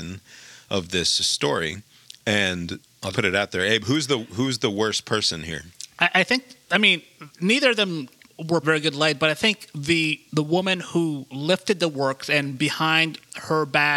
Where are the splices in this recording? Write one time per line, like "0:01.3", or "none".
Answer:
0:02.0
0:03.1
0:08.6
0:10.3

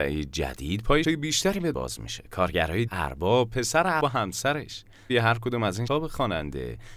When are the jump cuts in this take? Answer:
0:01.0
0:01.7
0:02.9
0:04.0
0:05.1
0:05.9

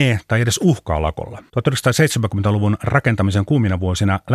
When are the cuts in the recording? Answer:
0:01.5

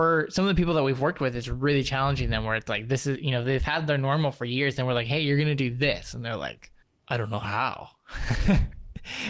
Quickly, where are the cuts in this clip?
0:06.8

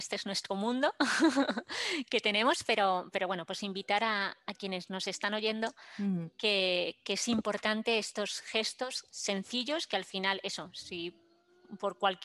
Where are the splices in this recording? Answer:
none

